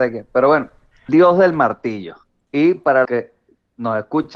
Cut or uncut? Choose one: cut